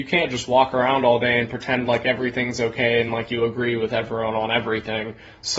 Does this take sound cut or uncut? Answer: uncut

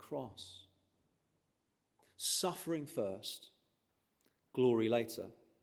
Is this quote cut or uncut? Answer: uncut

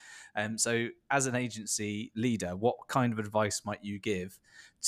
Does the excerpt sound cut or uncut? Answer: uncut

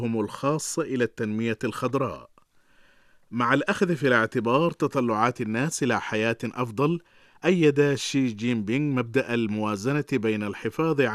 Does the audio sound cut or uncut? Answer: uncut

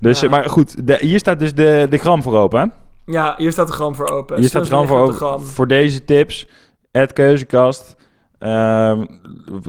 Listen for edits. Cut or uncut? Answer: uncut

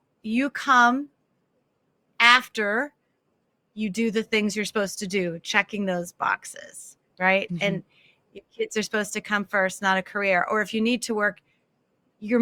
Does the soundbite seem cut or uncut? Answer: uncut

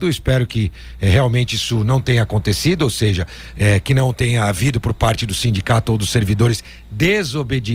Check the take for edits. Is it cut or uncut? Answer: uncut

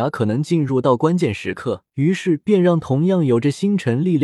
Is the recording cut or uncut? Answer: cut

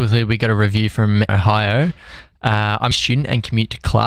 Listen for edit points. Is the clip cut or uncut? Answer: cut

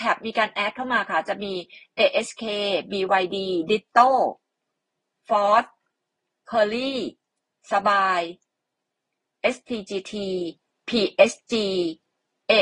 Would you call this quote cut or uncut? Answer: uncut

